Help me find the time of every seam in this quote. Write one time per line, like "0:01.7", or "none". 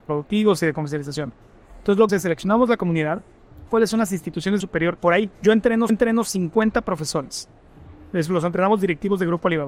0:02.1
0:03.7
0:04.6
0:05.0
0:05.3
0:05.9